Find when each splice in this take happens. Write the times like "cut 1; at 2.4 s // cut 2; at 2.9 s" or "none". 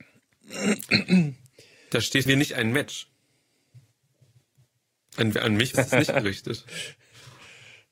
cut 1; at 2.3 s // cut 2; at 5.7 s